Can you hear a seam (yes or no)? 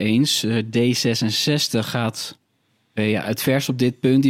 no